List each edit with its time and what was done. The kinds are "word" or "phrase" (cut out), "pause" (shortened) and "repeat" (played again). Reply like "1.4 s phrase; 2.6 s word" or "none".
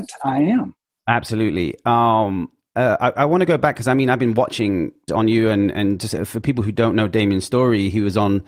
5.1 s phrase